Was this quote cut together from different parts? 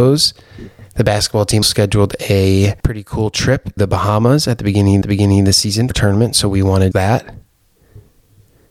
yes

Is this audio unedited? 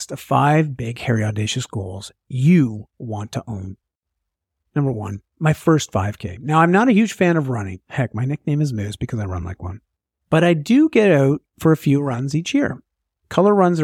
yes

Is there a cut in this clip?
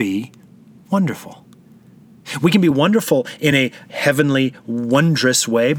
no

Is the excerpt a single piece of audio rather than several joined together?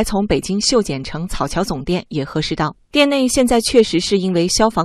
yes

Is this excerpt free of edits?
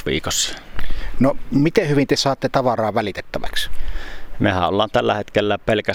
yes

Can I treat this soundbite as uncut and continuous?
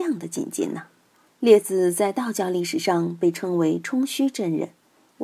no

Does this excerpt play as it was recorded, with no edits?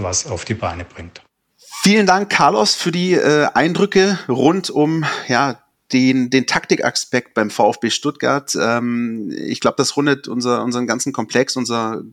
yes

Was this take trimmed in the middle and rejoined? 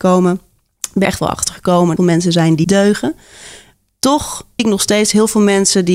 yes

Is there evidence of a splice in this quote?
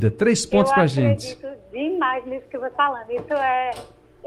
yes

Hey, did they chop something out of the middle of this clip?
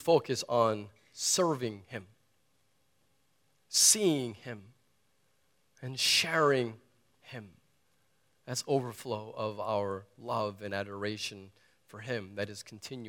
no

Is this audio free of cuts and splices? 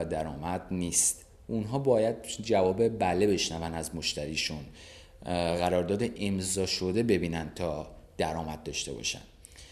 yes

